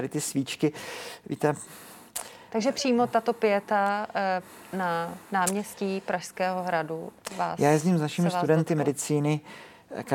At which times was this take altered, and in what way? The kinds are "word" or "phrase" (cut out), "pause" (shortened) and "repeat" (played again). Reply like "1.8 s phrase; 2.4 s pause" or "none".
5.2 s pause